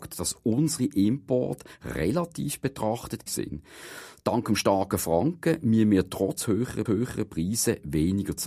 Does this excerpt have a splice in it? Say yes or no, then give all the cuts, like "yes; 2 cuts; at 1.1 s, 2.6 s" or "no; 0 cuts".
yes; 2 cuts; at 3.3 s, 6.9 s